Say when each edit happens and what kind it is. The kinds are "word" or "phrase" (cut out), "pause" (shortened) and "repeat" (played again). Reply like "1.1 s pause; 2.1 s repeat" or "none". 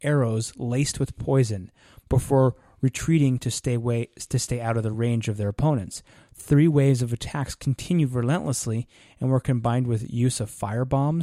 none

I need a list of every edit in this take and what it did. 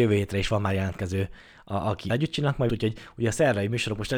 2.1 s word; 2.7 s word

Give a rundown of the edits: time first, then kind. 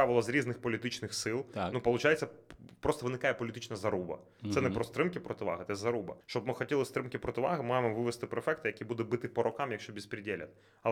6.2 s pause

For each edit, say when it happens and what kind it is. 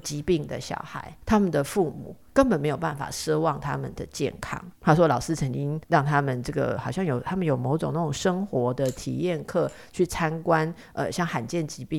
1.2 s pause; 4.8 s pause; 5.8 s pause

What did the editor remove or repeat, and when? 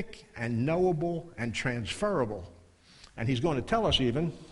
none

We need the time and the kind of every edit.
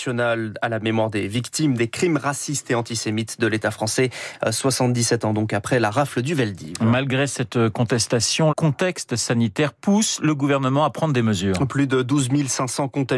8.5 s word

